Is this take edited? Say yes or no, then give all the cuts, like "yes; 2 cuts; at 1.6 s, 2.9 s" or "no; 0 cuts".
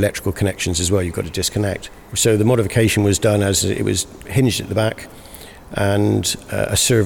yes; 1 cut; at 4.2 s